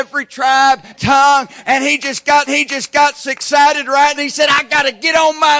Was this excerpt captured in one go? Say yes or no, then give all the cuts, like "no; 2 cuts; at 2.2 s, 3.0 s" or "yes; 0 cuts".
no; 3 cuts; at 0.9 s, 2.5 s, 4.2 s